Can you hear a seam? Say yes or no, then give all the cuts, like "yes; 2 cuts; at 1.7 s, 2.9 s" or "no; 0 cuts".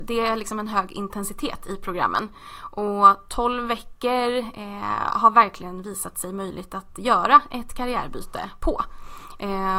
no; 0 cuts